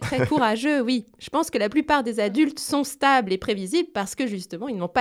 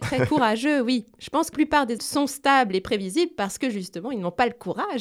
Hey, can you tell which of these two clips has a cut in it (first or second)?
second